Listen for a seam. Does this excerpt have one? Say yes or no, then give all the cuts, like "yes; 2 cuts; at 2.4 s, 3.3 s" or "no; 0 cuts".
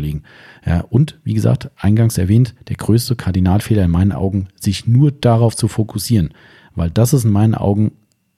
no; 0 cuts